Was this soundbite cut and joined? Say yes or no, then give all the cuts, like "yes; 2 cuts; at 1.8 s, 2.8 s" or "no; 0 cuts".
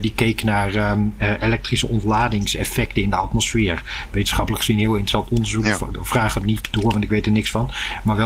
no; 0 cuts